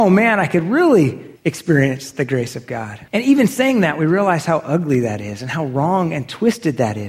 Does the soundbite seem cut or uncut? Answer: cut